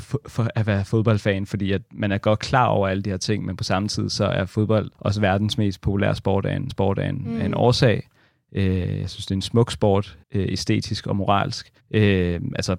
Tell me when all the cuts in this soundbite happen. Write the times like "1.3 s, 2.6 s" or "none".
4.9 s, 6.7 s, 10.2 s, 11.8 s